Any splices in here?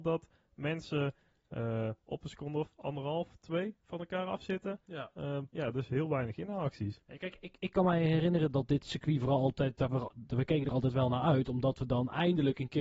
yes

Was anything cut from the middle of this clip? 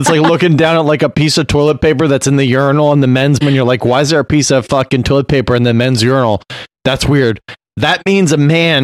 yes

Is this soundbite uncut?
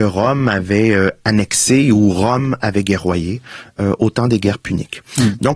yes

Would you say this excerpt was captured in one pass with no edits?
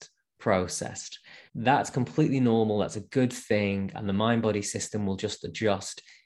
no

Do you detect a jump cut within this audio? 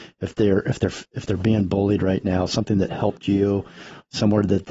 no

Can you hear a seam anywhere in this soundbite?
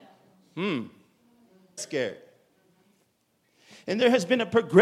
yes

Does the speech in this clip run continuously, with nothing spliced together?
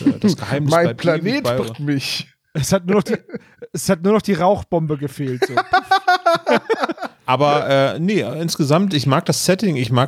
no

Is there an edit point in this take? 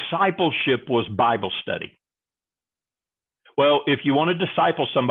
no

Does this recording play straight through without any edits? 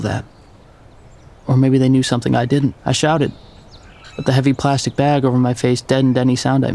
no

